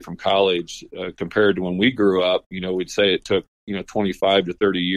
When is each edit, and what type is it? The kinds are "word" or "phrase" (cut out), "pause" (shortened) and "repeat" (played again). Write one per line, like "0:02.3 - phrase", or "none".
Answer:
none